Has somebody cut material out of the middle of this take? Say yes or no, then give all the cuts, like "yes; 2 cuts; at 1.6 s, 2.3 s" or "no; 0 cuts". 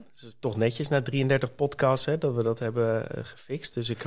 no; 0 cuts